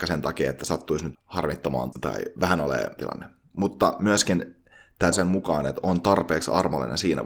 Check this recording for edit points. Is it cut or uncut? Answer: cut